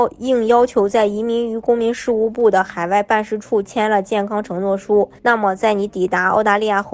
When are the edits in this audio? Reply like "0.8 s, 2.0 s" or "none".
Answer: 5.2 s